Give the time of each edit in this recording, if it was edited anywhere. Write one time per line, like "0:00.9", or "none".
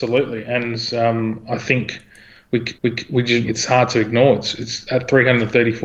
0:02.8
0:03.4